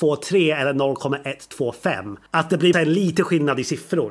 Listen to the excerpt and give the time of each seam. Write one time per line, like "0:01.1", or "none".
0:02.3
0:02.7